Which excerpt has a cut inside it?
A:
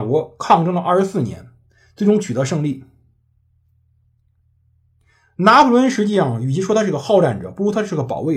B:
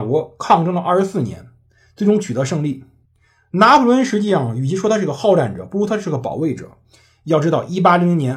B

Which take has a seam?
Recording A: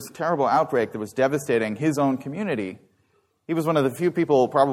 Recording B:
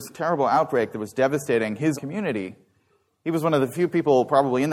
B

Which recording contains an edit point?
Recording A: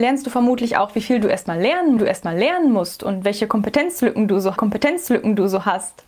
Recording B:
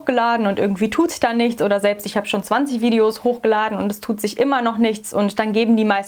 A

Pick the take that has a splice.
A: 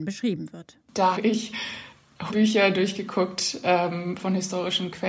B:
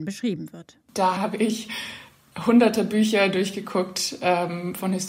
A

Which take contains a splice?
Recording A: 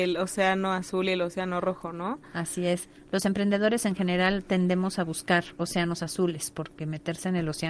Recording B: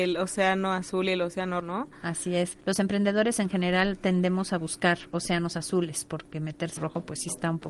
B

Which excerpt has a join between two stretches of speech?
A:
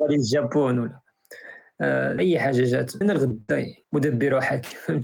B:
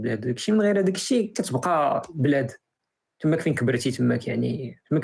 A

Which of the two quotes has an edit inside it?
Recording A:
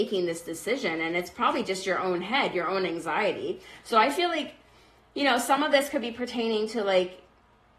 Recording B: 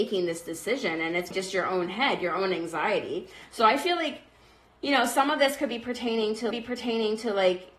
B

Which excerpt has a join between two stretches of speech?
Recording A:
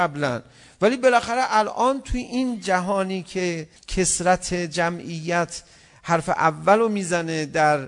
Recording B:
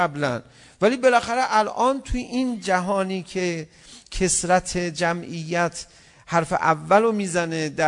A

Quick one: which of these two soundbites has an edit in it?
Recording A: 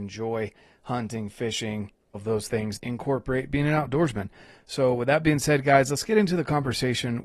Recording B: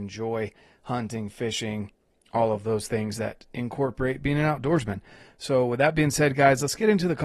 A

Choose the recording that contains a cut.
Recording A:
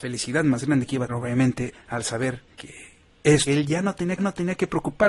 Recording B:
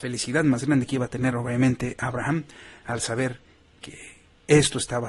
A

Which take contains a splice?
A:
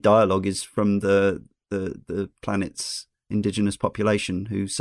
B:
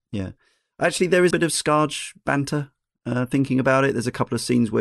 B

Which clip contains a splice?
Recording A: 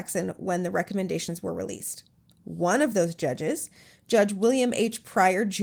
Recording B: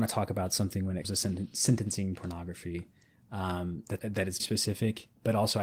B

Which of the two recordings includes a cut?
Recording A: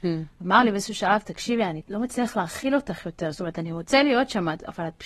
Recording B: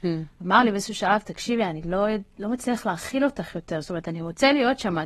A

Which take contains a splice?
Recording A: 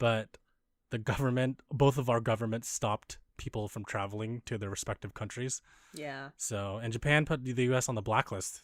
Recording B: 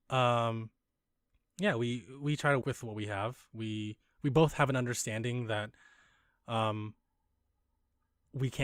B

